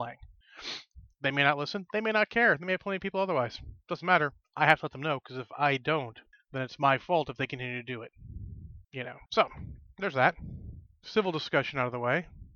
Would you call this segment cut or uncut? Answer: cut